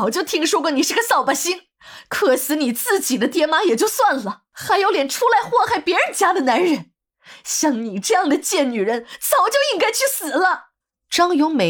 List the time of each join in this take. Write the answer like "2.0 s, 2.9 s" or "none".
10.8 s